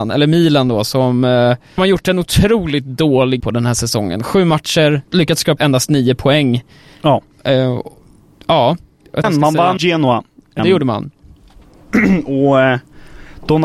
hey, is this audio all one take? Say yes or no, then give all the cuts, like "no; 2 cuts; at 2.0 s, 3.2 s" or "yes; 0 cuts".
no; 7 cuts; at 1.8 s, 3.4 s, 5.1 s, 5.6 s, 9.2 s, 9.8 s, 10.6 s